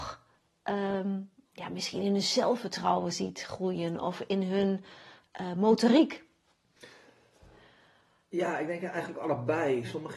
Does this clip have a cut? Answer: no; 0 cuts

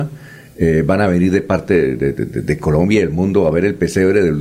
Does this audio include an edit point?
yes; 1 cut; at 2.1 s

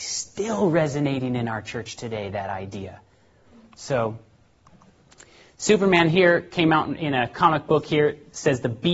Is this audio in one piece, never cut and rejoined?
yes; 0 cuts

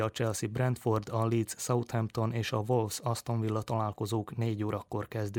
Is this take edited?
no; 0 cuts

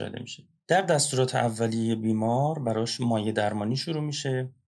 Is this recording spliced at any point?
no; 0 cuts

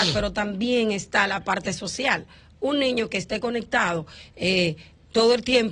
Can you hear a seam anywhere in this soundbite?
no; 0 cuts

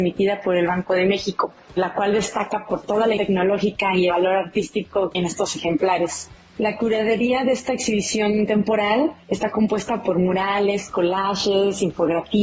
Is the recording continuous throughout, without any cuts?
no; 3 cuts; at 3.2 s, 4.1 s, 5.1 s

